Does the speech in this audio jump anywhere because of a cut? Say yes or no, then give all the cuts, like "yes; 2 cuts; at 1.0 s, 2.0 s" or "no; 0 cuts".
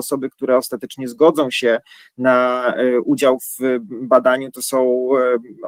no; 0 cuts